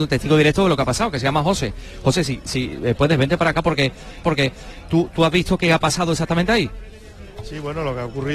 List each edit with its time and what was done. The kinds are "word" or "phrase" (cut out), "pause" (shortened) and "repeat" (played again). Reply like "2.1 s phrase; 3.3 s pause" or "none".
4.2 s repeat